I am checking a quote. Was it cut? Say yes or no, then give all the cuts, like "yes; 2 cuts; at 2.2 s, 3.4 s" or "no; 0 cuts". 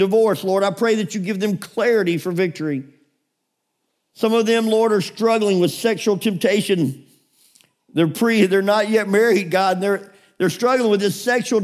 no; 0 cuts